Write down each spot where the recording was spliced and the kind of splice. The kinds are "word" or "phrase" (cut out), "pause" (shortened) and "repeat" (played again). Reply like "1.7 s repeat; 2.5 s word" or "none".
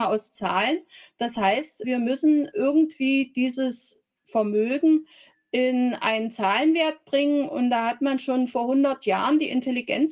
none